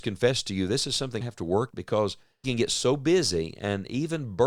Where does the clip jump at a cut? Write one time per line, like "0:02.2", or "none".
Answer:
0:01.2
0:01.7
0:02.4